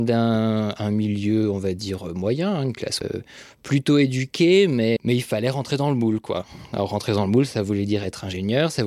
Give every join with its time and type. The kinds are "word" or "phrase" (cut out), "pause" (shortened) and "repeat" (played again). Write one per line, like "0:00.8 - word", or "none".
0:03.0 - word
0:05.0 - word